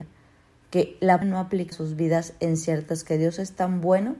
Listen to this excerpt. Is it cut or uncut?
cut